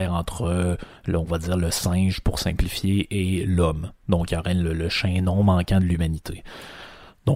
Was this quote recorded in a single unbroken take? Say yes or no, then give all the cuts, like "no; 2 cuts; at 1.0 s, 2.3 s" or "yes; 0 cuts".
yes; 0 cuts